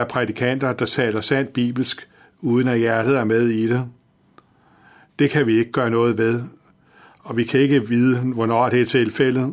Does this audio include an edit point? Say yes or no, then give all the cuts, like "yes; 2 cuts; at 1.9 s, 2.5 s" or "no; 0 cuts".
no; 0 cuts